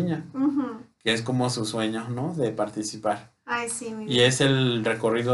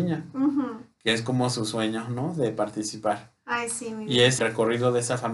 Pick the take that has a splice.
second; 1 cut; at 4.4 s

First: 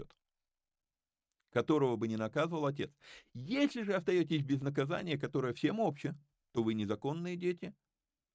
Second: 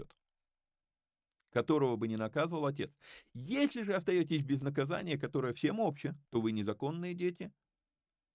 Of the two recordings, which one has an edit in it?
second; 1 cut; at 6.2 s

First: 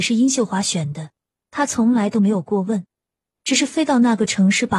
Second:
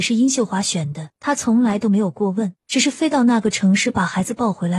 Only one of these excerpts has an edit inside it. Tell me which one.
second; 2 cuts; at 1.1 s, 2.6 s

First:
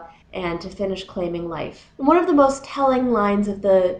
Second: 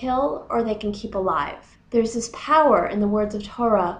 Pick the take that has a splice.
first; 1 cut; at 1.9 s

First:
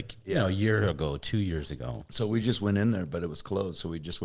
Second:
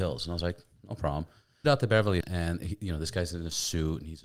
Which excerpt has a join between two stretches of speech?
second; 2 cuts; at 1.6 s, 2.2 s

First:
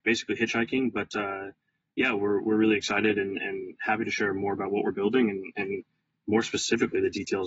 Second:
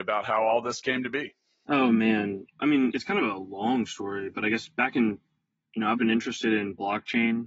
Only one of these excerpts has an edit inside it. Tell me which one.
second; 3 cuts; at 2.6 s, 2.9 s, 6.0 s

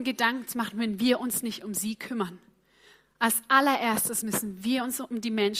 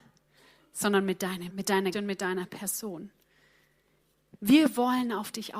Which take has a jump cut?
second; 2 cuts; at 1.5 s, 1.9 s

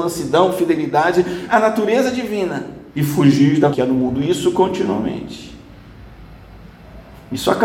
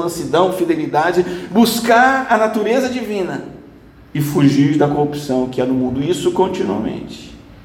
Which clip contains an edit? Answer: first; 3 cuts; at 1.5 s, 2.9 s, 3.7 s

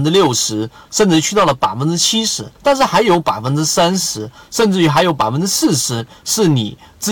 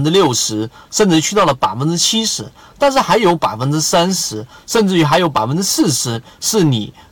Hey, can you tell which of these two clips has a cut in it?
first; 1 cut; at 2.6 s

